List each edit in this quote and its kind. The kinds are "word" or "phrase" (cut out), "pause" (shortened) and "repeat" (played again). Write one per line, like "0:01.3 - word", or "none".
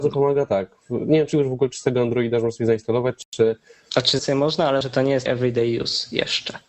0:01.3 - word
0:04.2 - word
0:04.8 - word
0:05.3 - word